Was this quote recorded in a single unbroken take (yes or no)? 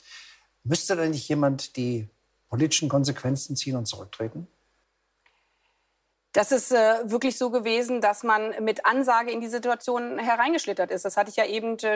yes